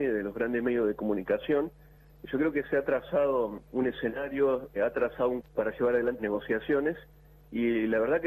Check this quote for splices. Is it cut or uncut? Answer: cut